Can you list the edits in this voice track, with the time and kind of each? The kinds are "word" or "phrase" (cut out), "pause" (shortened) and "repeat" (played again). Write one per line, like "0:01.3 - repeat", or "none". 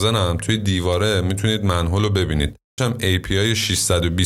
0:02.8 - word